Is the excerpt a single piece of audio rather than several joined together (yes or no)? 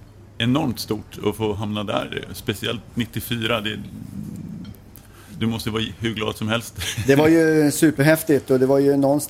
yes